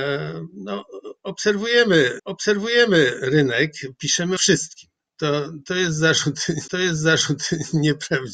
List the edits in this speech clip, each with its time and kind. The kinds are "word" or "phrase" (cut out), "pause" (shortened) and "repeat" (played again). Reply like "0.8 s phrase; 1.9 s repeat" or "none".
2.2 s repeat; 4.4 s word; 6.7 s repeat